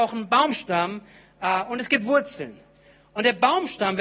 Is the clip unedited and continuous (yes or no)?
yes